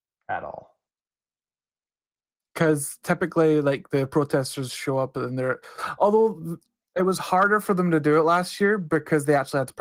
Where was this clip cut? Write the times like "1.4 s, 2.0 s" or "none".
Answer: none